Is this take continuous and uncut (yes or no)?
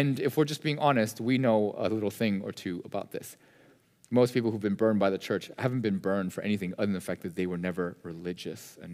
yes